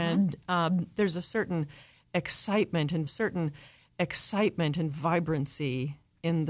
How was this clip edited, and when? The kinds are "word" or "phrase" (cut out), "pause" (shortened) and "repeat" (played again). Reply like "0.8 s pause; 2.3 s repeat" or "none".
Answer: 3.1 s repeat